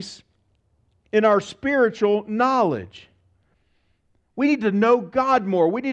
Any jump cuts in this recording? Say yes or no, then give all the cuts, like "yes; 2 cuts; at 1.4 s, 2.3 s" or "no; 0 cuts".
no; 0 cuts